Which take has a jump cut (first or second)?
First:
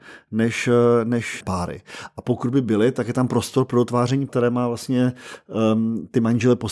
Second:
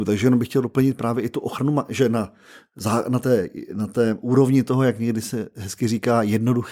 first